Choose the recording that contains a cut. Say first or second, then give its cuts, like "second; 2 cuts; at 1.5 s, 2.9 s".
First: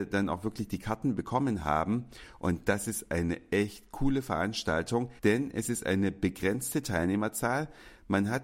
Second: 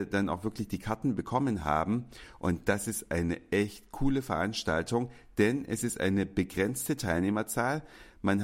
first; 1 cut; at 5.2 s